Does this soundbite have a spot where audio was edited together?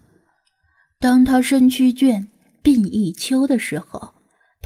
no; 0 cuts

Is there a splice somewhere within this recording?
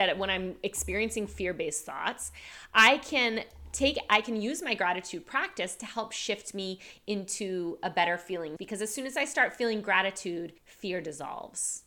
yes; 2 cuts; at 8.6 s, 10.6 s

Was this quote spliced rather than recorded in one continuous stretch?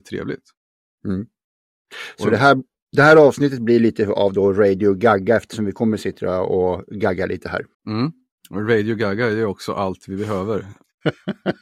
yes; 1 cut; at 7.7 s

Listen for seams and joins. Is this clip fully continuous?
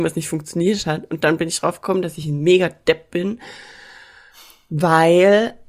yes; 0 cuts

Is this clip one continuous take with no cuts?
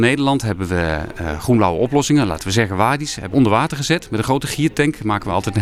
no; 1 cut; at 3.3 s

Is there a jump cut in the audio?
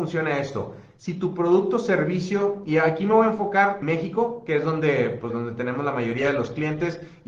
yes; 2 cuts; at 3.8 s, 5.3 s

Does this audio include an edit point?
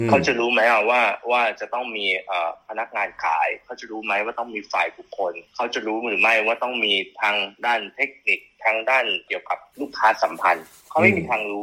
yes; 1 cut; at 5.5 s

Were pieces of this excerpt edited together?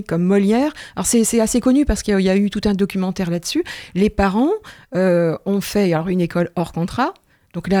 no; 0 cuts

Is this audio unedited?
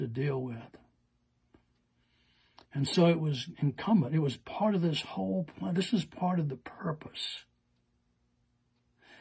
yes; 0 cuts

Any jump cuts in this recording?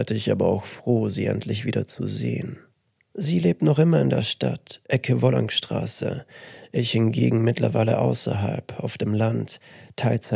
no; 0 cuts

